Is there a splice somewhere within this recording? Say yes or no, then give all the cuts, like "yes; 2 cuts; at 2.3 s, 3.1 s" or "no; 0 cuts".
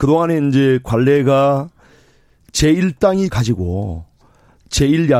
yes; 1 cut; at 3.3 s